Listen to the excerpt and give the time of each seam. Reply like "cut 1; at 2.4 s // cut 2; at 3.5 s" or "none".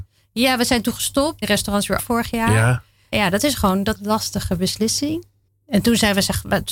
cut 1; at 1.4 s // cut 2; at 2.0 s // cut 3; at 3.1 s // cut 4; at 3.9 s // cut 5; at 5.5 s